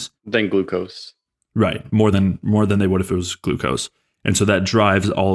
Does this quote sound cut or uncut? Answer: uncut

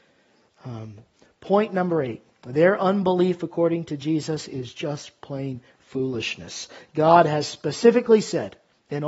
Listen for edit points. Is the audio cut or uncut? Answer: uncut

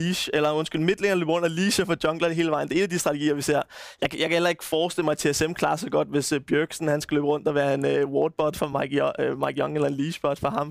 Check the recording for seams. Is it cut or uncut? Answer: uncut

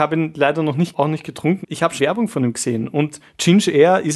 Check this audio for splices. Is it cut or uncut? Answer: cut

